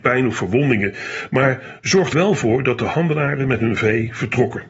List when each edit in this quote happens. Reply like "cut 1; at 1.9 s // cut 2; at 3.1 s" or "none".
cut 1; at 2.1 s